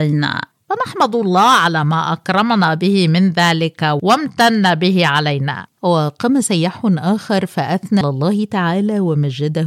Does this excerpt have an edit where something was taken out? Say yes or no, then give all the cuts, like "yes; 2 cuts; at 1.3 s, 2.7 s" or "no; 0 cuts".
yes; 2 cuts; at 5.7 s, 8.0 s